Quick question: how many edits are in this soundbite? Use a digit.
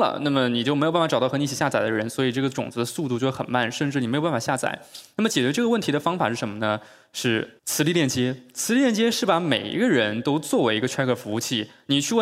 1